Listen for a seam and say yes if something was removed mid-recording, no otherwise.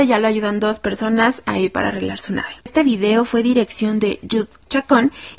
yes